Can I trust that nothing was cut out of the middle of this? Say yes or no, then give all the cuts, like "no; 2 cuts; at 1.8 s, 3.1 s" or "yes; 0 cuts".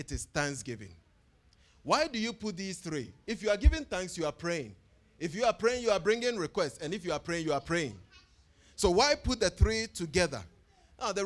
yes; 0 cuts